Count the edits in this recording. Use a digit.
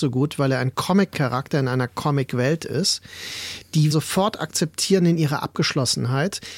1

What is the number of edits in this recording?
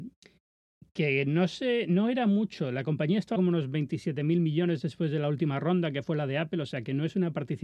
1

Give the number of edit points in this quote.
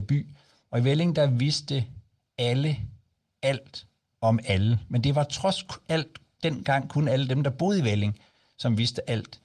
0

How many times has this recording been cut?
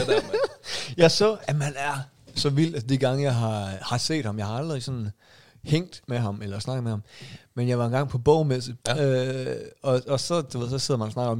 1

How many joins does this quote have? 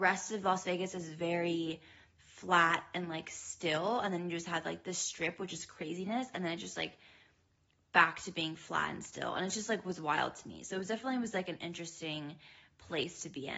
0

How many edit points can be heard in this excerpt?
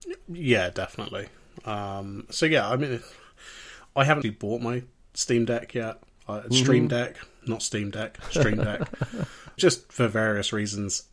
2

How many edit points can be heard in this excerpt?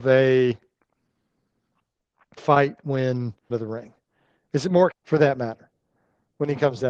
3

